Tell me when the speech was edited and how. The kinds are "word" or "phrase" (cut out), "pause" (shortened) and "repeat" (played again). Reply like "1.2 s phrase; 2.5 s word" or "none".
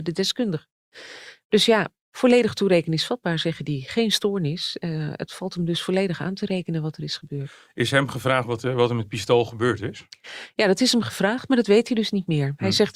none